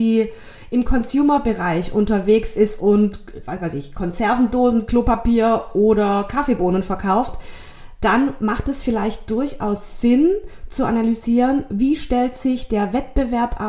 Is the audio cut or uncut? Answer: uncut